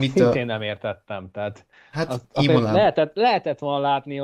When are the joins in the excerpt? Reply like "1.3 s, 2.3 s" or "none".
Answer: none